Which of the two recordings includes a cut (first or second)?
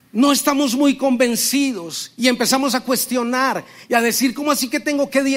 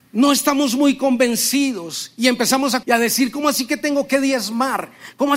second